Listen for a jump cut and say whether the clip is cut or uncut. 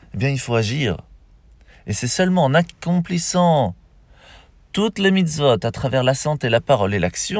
uncut